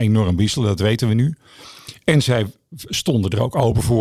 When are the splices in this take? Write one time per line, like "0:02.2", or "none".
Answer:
none